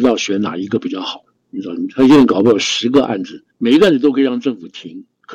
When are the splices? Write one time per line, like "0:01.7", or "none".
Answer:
0:01.3
0:03.5